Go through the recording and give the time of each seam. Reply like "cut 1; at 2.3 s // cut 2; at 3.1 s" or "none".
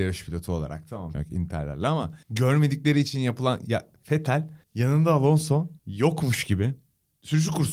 cut 1; at 1.1 s // cut 2; at 2.2 s // cut 3; at 4.6 s // cut 4; at 5.8 s